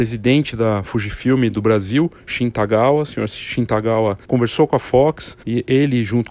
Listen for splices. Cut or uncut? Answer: cut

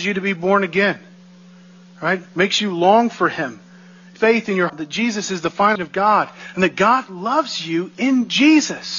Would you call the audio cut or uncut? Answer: cut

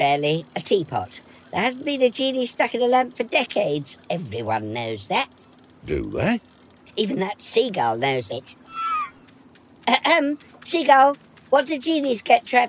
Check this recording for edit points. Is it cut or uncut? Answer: uncut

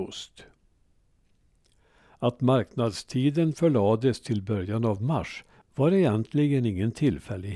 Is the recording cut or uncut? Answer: uncut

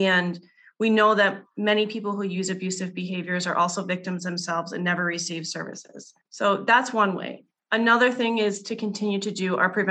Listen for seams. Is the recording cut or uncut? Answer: uncut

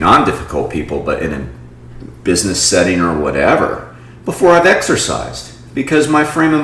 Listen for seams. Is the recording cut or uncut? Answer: uncut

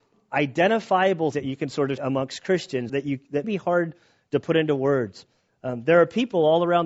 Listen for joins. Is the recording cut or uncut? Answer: cut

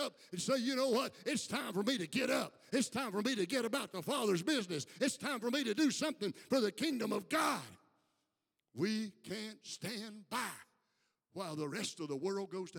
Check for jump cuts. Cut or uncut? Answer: uncut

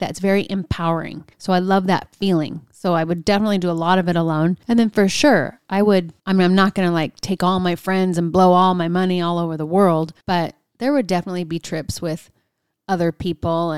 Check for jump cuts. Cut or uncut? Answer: cut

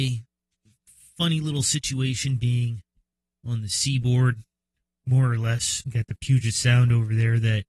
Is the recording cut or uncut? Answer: uncut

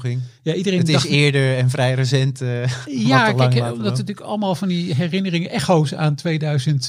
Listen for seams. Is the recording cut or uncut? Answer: uncut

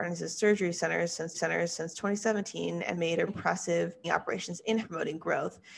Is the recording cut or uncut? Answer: cut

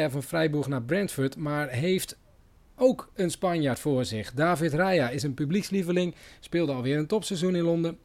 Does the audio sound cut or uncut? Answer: uncut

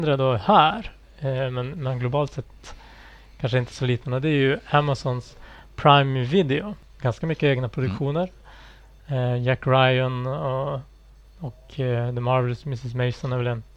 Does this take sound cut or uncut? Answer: uncut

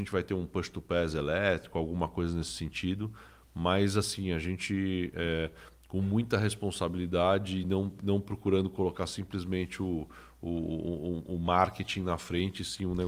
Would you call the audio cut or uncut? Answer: uncut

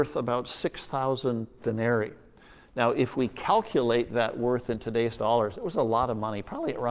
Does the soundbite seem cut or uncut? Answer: uncut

